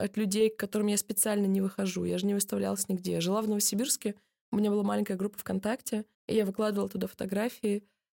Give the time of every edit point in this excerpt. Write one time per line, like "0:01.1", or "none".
0:06.1